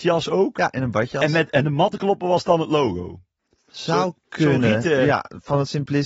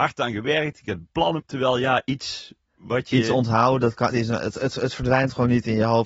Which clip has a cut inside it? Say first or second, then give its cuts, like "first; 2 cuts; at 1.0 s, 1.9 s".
second; 2 cuts; at 1.4 s, 4.1 s